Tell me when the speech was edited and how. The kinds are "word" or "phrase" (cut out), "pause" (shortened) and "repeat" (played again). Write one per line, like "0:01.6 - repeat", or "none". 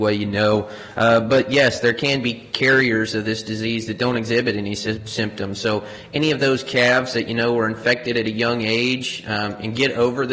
none